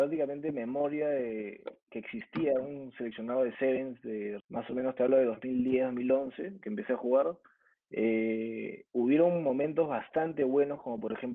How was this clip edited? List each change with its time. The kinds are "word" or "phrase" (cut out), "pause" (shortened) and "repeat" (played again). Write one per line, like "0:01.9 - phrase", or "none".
0:04.4 - word
0:08.9 - pause